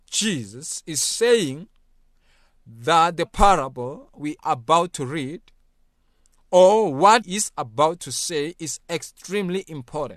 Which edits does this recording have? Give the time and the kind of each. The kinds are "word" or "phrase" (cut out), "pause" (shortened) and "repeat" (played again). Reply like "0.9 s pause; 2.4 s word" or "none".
3.3 s word; 4.4 s word; 7.2 s word